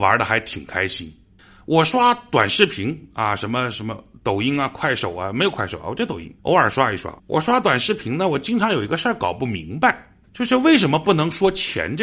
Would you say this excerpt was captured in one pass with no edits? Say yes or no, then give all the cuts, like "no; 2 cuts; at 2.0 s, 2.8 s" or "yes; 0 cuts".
no; 4 cuts; at 1.4 s, 6.4 s, 7.2 s, 10.2 s